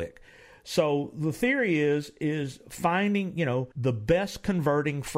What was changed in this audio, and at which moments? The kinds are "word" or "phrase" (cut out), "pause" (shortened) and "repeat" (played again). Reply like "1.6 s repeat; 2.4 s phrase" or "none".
3.7 s pause